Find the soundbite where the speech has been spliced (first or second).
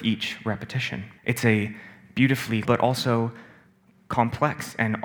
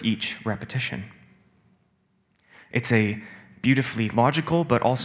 first